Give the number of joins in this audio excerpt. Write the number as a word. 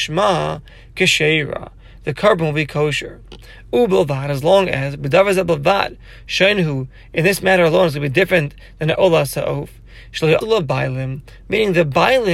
two